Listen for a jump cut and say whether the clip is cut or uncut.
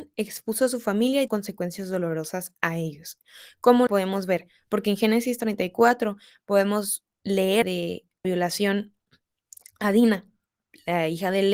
cut